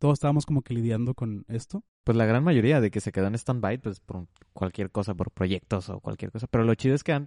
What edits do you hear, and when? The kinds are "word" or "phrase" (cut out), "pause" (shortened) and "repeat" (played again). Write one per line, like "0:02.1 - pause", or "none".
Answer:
none

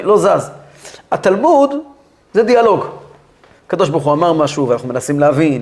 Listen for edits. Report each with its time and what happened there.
none

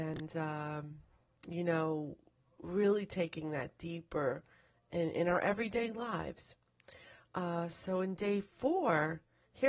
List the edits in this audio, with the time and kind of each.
none

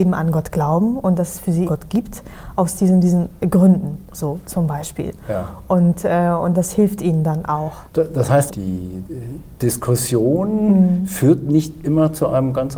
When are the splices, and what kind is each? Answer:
0:01.7 - word
0:07.9 - pause
0:08.5 - phrase

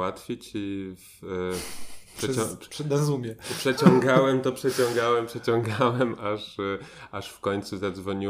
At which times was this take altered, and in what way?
none

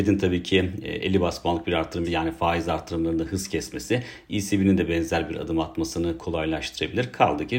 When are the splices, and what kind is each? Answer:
0:02.0 - word

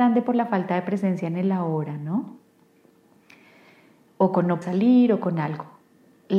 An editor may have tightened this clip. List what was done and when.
0:04.6 - word

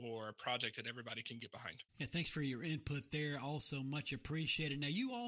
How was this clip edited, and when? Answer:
0:01.9 - pause

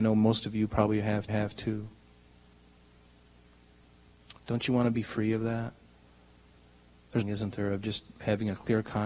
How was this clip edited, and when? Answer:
0:01.3 - repeat
0:07.2 - phrase

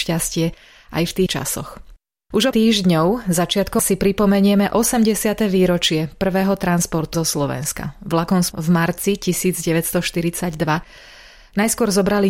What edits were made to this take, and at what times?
0:01.3 - word
0:02.5 - word
0:03.8 - word
0:04.7 - word
0:07.1 - word
0:08.5 - word

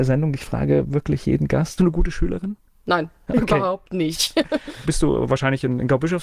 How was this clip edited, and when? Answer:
0:01.8 - word
0:04.8 - word

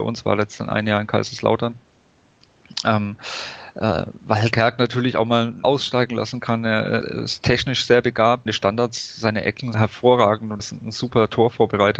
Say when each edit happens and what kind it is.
0:05.6 - phrase
0:07.0 - word
0:08.5 - phrase
0:09.7 - phrase
0:10.6 - word

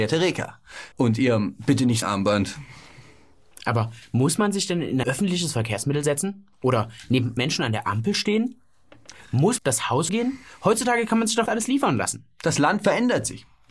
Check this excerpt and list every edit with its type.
0:00.9 - pause
0:02.0 - word
0:05.0 - word
0:07.4 - word
0:09.6 - word
0:10.1 - phrase
0:11.5 - word

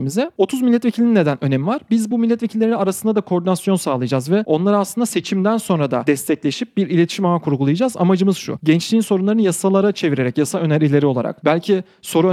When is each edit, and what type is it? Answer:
none

